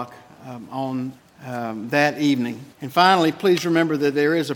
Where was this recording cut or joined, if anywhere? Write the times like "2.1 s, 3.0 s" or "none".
1.2 s, 2.7 s